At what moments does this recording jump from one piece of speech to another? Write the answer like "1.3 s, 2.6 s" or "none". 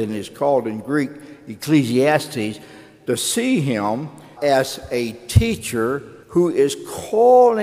4.4 s, 6.2 s